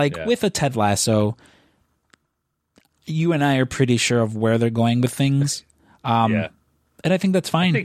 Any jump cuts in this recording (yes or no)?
no